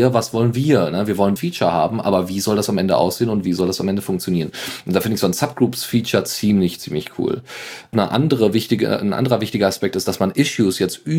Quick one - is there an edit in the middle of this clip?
yes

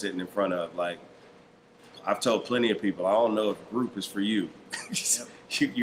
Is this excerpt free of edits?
yes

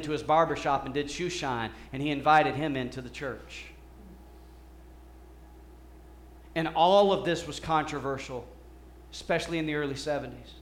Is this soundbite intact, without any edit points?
yes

